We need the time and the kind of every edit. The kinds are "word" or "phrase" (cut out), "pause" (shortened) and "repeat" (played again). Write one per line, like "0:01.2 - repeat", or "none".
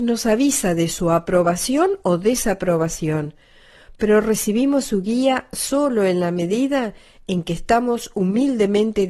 none